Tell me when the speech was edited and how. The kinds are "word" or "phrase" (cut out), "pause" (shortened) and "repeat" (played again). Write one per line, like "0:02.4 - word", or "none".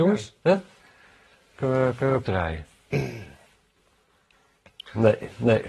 0:02.2 - word